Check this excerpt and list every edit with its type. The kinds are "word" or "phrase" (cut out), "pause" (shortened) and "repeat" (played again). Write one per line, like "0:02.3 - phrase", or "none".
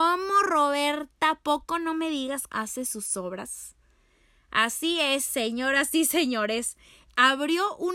0:02.5 - phrase

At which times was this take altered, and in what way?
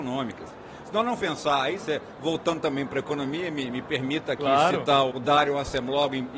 0:01.2 - word
0:01.8 - word
0:03.7 - word
0:05.1 - word

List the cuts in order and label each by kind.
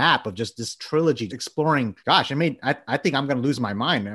0:01.3 - word
0:02.0 - pause

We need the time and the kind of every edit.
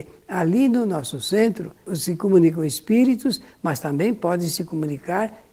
none

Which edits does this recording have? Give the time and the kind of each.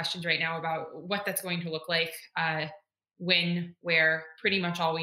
none

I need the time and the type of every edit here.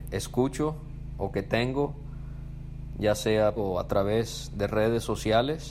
0:03.6 - word

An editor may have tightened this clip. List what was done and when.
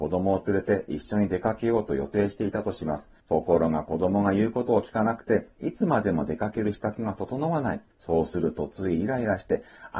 0:03.2 - pause
0:07.9 - pause

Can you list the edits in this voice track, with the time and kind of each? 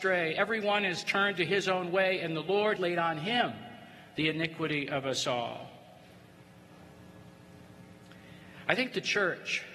0:02.8 - word

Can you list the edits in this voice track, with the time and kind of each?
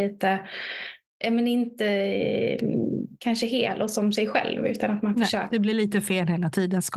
none

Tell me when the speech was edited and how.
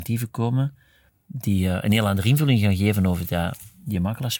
none

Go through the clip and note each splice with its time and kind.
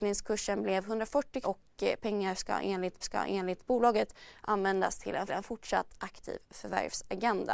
0:01.4 - word
0:03.0 - repeat
0:05.3 - repeat

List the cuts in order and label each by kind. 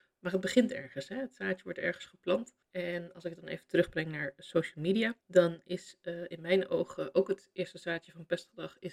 0:02.6 - pause
0:05.2 - pause

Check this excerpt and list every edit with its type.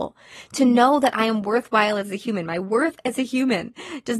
none

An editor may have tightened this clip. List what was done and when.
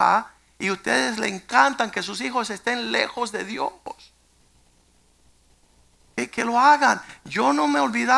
none

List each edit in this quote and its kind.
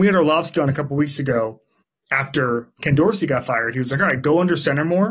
0:01.8 - pause

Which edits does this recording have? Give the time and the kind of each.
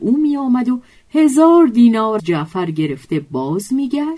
0:02.2 - word

